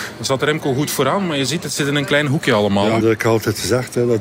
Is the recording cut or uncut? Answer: cut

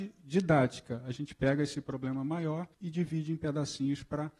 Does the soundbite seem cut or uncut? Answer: cut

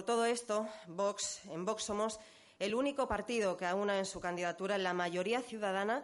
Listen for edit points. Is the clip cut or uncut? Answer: uncut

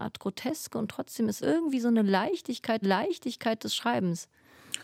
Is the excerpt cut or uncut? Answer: cut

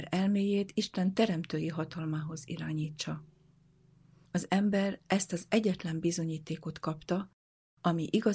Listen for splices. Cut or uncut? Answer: uncut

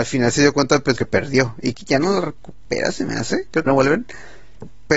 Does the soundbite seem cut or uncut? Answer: cut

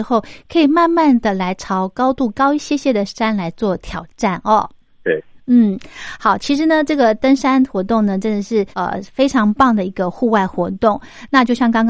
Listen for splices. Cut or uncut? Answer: cut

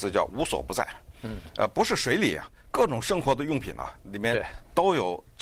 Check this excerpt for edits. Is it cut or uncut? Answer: uncut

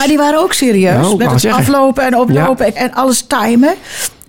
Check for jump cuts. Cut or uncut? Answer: cut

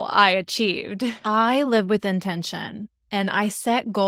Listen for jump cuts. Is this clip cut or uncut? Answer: uncut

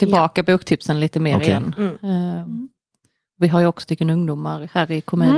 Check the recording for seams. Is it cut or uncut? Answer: cut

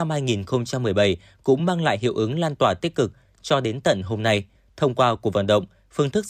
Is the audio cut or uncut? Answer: uncut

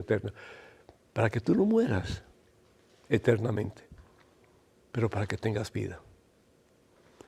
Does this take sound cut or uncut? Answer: uncut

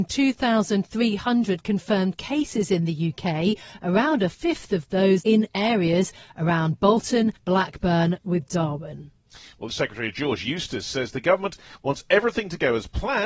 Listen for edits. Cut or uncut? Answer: cut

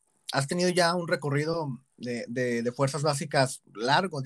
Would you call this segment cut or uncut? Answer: uncut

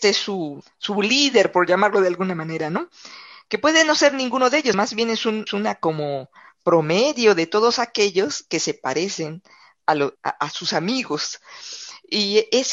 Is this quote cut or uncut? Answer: cut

